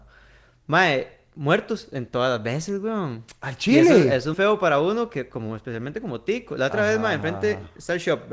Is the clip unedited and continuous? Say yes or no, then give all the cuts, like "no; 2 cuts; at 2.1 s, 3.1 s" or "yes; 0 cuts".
no; 1 cut; at 4.3 s